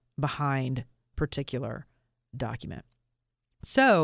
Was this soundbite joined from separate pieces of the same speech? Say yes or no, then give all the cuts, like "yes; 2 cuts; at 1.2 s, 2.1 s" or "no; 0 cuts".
yes; 1 cut; at 1.1 s